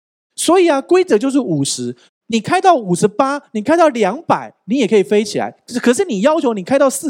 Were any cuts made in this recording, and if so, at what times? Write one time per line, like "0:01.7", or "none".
0:02.1